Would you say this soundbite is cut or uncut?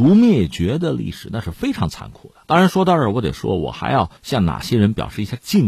cut